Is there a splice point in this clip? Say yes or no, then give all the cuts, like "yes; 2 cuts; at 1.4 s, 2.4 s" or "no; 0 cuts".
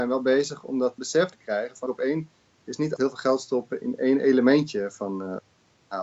yes; 5 cuts; at 1.0 s, 1.3 s, 1.9 s, 3.0 s, 3.8 s